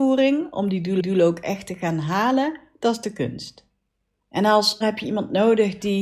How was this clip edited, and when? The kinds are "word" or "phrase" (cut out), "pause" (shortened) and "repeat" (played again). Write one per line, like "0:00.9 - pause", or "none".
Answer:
0:01.0 - repeat
0:03.9 - pause
0:04.8 - word